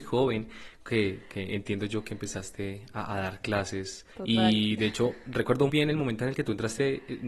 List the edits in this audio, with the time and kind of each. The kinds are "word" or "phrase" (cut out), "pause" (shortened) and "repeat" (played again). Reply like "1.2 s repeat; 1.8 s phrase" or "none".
4.1 s pause; 5.7 s word